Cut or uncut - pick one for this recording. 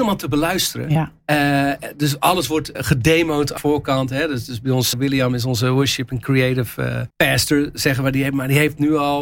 cut